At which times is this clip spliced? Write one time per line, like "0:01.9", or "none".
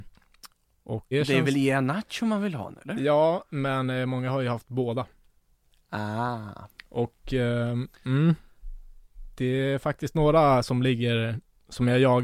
0:01.1
0:02.8

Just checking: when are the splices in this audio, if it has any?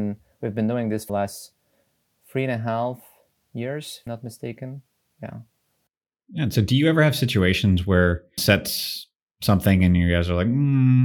0:01.1
0:04.1
0:08.4

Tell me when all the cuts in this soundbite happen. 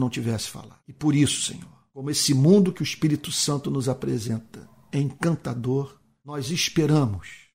none

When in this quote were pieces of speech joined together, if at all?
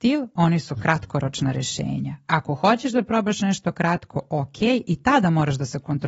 none

